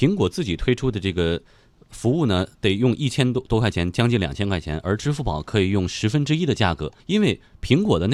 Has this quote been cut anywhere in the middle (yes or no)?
yes